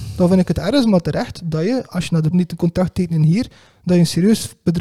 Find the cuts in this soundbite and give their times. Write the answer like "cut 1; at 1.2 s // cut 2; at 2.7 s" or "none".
cut 1; at 2.3 s